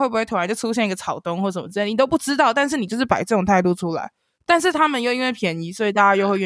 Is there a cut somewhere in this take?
no; 0 cuts

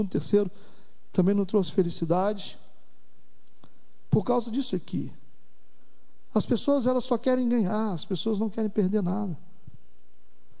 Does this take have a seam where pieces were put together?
no; 0 cuts

